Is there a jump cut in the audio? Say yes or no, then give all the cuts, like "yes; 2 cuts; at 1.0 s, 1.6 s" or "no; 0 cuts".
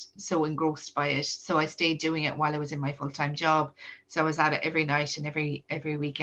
no; 0 cuts